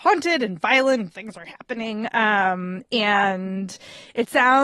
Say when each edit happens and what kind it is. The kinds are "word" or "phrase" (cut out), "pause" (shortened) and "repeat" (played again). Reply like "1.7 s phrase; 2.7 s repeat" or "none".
1.1 s word